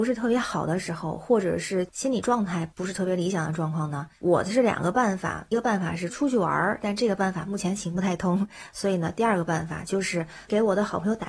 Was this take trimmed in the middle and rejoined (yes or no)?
yes